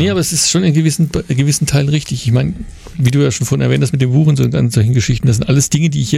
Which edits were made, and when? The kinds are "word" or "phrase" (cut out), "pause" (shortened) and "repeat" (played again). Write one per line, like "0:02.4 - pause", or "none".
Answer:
none